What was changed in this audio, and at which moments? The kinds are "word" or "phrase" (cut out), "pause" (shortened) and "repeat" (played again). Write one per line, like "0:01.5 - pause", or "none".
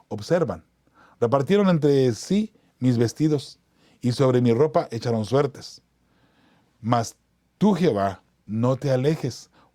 none